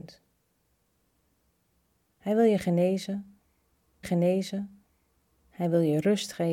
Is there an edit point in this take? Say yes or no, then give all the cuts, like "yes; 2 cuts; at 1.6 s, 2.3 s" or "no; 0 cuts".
yes; 1 cut; at 4.0 s